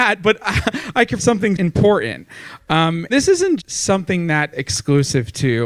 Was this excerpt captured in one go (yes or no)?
no